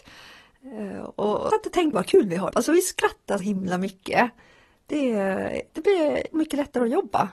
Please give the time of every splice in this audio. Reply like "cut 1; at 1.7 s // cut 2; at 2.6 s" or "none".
cut 1; at 1.5 s // cut 2; at 1.9 s // cut 3; at 2.5 s // cut 4; at 3.4 s // cut 5; at 5.7 s // cut 6; at 6.3 s